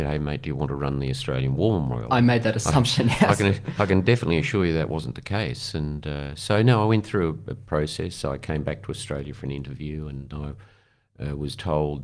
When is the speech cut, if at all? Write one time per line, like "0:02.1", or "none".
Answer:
0:10.3